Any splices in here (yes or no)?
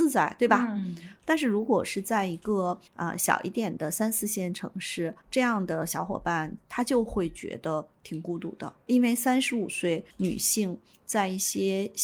yes